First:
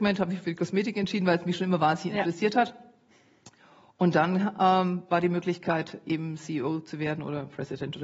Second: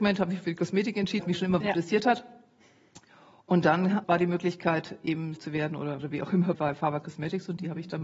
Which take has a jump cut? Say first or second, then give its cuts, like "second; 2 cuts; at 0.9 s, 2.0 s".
second; 7 cuts; at 1.2 s, 1.6 s, 4.0 s, 5.4 s, 6.0 s, 6.5 s, 7.0 s